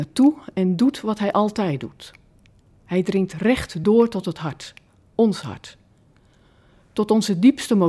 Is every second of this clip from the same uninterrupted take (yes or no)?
yes